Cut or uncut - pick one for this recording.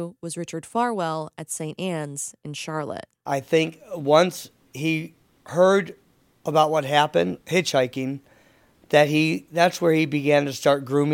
cut